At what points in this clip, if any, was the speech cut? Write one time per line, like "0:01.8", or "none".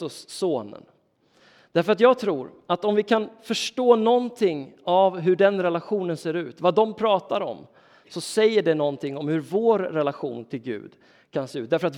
none